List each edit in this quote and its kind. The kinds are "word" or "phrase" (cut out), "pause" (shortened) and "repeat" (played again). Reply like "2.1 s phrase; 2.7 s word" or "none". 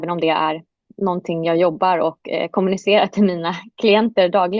none